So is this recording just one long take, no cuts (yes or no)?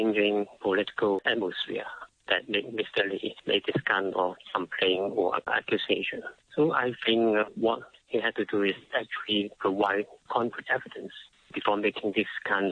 yes